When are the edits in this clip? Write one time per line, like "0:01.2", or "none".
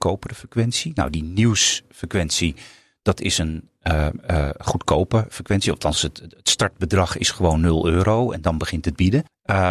none